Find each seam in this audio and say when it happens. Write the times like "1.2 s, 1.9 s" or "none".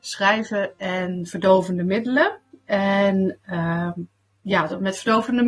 none